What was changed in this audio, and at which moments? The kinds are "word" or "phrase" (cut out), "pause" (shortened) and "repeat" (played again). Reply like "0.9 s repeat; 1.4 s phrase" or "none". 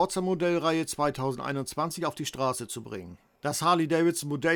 none